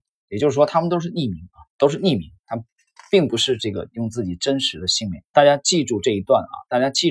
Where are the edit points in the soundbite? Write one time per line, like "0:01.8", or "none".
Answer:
0:01.7
0:02.4
0:05.3